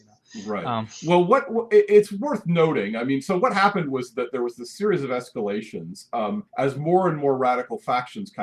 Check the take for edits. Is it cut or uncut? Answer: cut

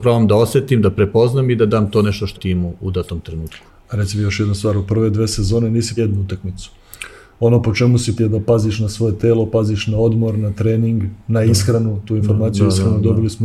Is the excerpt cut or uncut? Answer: cut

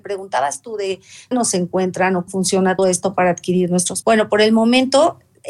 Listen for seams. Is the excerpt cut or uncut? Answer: cut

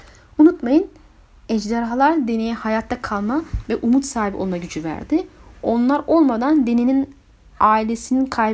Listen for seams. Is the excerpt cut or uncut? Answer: uncut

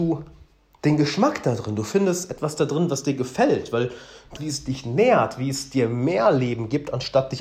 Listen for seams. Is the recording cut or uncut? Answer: cut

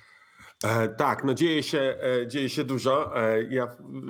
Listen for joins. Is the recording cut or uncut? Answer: uncut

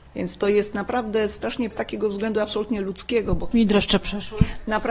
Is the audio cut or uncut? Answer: cut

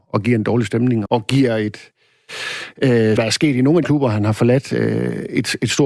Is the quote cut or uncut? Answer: cut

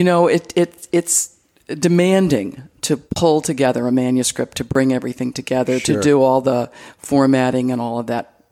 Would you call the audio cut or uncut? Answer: uncut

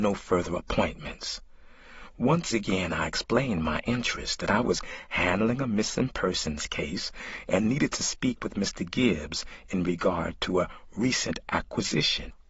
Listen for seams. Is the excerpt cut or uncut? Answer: uncut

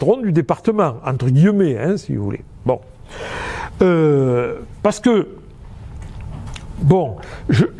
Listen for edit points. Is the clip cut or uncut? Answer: uncut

